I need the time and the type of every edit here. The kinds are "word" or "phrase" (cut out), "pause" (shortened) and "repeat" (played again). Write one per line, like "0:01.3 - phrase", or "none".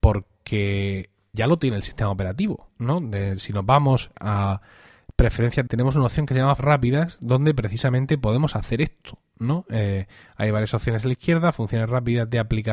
0:01.3 - word
0:04.1 - word
0:05.7 - phrase
0:06.6 - word